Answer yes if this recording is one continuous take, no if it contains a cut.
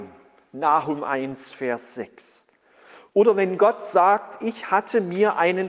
yes